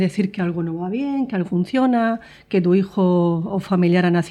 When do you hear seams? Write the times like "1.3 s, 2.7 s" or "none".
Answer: 1.4 s